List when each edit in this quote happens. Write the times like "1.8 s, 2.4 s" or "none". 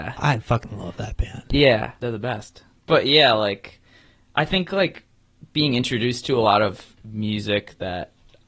none

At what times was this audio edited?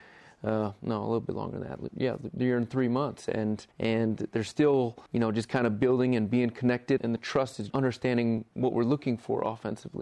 3.7 s, 5.1 s, 7.0 s, 7.7 s

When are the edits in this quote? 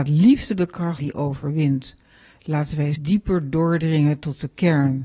1.0 s, 2.9 s

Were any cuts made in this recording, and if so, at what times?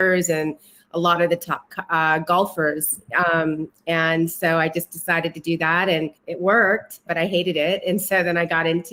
6.2 s, 7.1 s

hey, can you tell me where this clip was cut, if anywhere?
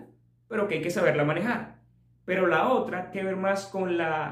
3.1 s

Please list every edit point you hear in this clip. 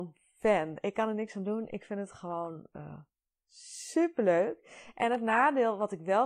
none

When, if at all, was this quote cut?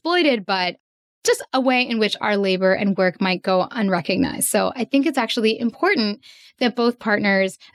none

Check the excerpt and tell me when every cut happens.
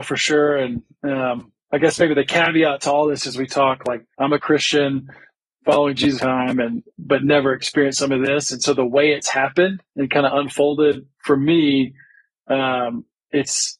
4.1 s, 6.2 s, 9.9 s

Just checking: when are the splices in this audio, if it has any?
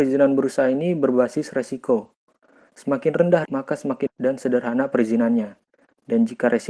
3.4 s, 4.1 s

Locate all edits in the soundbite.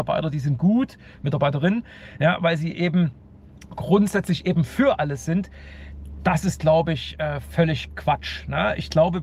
3.8 s

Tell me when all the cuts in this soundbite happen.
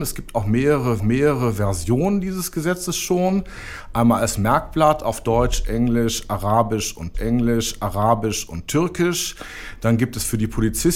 1.0 s, 7.1 s

